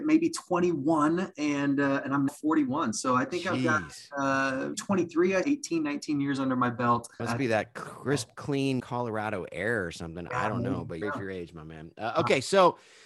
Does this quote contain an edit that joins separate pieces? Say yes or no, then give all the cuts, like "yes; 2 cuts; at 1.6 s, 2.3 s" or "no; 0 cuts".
yes; 6 cuts; at 2.3 s, 4.7 s, 5.4 s, 7.2 s, 8.8 s, 11.0 s